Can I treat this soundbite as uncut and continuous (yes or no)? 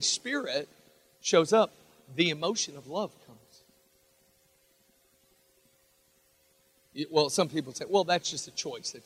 yes